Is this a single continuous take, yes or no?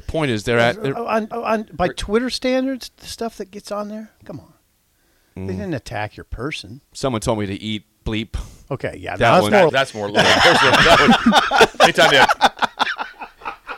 no